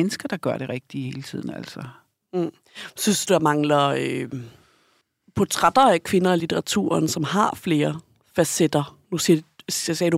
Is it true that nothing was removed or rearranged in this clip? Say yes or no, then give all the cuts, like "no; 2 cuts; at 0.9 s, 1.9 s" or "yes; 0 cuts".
yes; 0 cuts